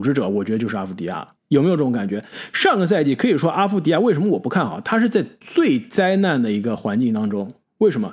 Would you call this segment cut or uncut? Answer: cut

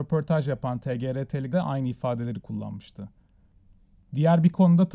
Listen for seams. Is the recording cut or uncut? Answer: cut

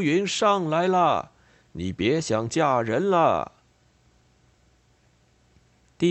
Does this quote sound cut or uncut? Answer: uncut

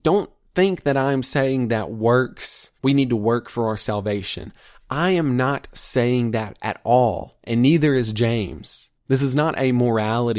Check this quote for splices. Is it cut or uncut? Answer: cut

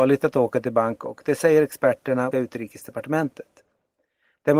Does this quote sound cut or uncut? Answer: cut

